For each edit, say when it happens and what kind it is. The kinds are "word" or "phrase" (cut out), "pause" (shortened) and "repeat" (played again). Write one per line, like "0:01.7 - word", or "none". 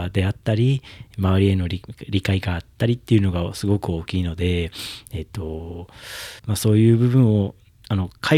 0:06.4 - pause